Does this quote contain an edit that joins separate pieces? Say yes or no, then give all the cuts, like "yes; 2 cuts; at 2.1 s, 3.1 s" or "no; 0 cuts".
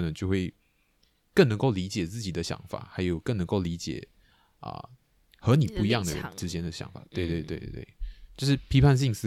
no; 0 cuts